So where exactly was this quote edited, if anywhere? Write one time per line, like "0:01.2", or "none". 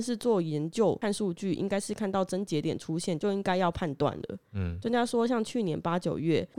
none